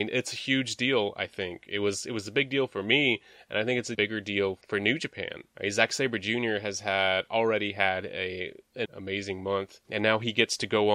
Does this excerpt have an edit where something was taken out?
yes; 2 cuts; at 3.9 s, 8.8 s

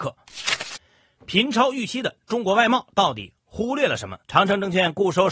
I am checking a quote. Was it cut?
yes; 1 cut; at 4.2 s

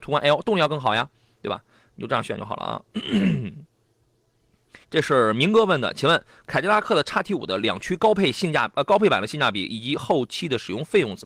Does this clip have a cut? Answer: yes; 1 cut; at 4.8 s

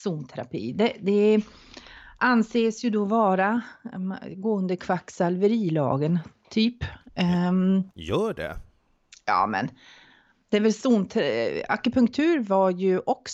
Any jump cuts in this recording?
no; 0 cuts

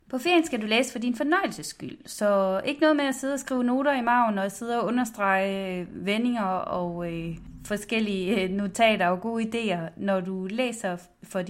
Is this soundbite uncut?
yes; 0 cuts

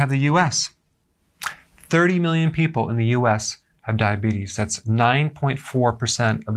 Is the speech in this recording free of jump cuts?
yes; 0 cuts

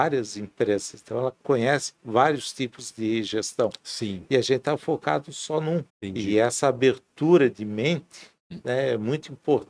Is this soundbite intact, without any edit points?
no; 3 cuts; at 5.9 s, 7.5 s, 8.4 s

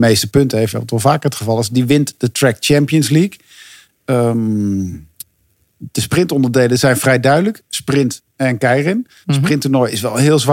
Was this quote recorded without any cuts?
yes; 0 cuts

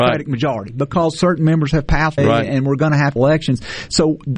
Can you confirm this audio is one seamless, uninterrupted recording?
no; 2 cuts; at 2.2 s, 3.2 s

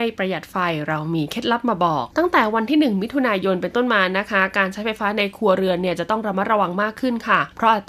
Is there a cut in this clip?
yes; 1 cut; at 2.1 s

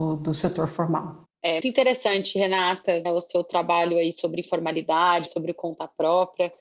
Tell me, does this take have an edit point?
yes; 3 cuts; at 1.6 s, 3.1 s, 5.3 s

